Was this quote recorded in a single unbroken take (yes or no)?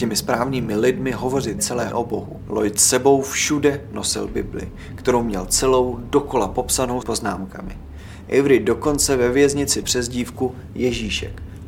no